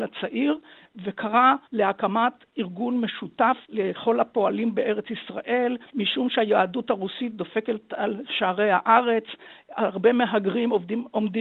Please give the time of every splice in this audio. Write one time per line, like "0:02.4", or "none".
0:01.7
0:03.6
0:05.9